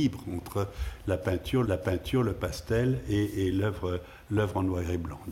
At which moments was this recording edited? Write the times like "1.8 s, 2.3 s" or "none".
1.6 s